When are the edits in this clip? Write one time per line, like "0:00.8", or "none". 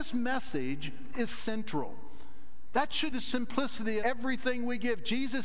0:01.1
0:03.1
0:04.0